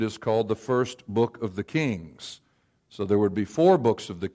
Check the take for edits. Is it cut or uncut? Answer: uncut